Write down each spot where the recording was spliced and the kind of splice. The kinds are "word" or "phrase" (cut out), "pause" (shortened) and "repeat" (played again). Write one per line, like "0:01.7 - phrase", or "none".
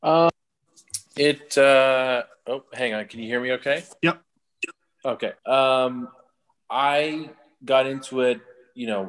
0:01.1 - pause
0:02.3 - pause
0:04.0 - pause
0:05.4 - pause